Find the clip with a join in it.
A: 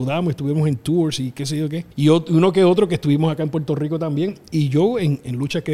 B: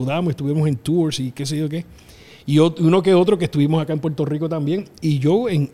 A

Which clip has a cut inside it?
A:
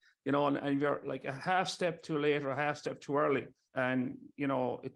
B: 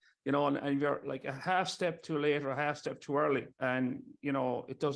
B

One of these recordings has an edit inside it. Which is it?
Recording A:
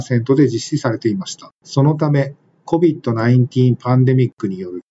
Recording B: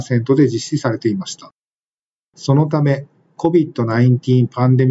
A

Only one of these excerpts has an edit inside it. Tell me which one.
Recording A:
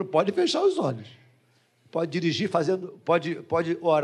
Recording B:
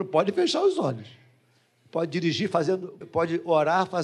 B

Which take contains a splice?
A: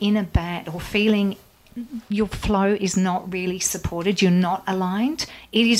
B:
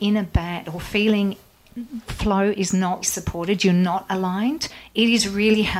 B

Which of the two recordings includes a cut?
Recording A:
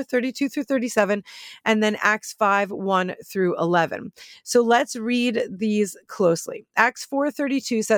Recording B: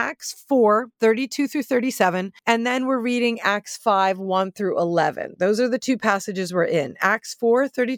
B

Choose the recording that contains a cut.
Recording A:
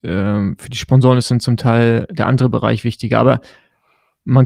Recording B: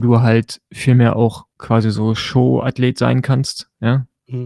B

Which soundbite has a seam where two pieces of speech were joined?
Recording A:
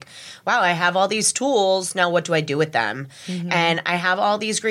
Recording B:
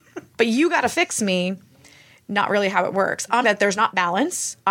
B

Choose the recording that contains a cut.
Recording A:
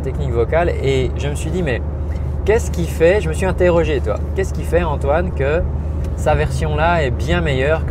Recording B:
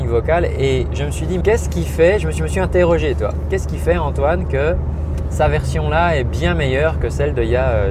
B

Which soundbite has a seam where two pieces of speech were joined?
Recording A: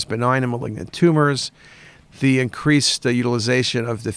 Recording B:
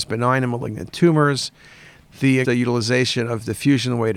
B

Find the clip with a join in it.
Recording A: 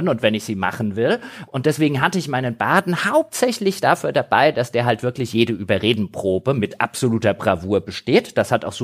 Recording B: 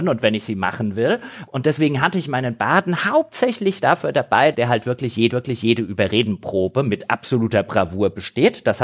B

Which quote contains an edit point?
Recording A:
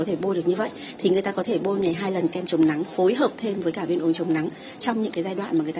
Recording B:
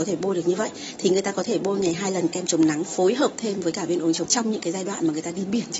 B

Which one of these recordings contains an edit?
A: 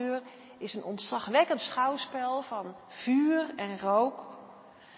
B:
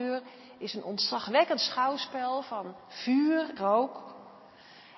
B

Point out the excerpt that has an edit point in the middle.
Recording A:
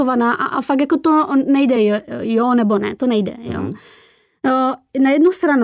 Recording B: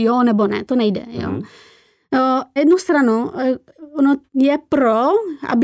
B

